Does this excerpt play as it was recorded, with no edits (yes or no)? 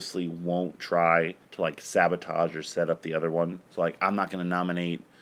no